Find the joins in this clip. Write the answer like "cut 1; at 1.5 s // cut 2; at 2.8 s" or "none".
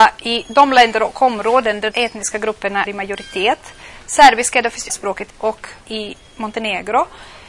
cut 1; at 1.9 s // cut 2; at 2.9 s // cut 3; at 4.9 s // cut 4; at 5.3 s // cut 5; at 5.8 s